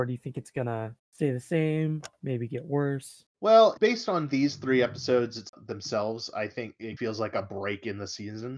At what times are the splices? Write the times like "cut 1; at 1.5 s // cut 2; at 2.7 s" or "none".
cut 1; at 1.0 s // cut 2; at 3.3 s